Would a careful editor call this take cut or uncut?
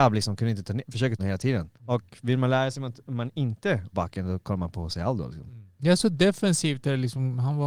cut